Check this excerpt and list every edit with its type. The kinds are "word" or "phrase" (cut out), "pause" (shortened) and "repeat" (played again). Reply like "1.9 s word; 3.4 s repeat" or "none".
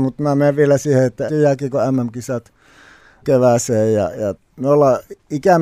1.3 s word; 3.2 s word; 4.3 s word